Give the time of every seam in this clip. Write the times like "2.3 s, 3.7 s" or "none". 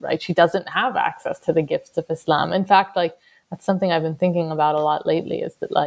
none